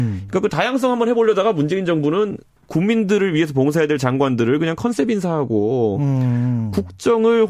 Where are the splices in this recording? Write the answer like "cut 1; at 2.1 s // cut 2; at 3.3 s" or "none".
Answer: none